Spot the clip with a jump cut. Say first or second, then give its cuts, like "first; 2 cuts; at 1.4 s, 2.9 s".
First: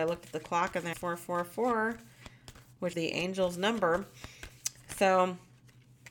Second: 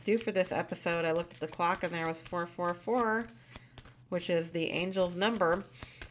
first; 2 cuts; at 0.9 s, 2.9 s